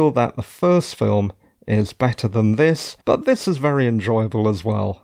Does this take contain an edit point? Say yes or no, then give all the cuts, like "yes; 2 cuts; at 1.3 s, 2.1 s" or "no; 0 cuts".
yes; 1 cut; at 3.0 s